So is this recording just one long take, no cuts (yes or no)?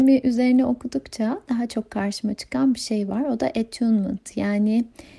yes